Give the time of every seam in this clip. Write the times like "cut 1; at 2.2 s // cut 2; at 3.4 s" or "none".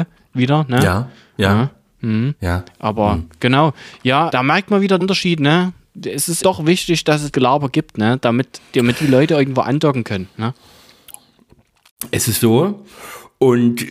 cut 1; at 4.3 s // cut 2; at 5.0 s // cut 3; at 6.4 s // cut 4; at 7.3 s // cut 5; at 12.4 s